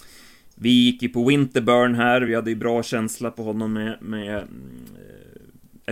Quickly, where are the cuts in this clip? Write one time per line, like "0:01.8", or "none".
none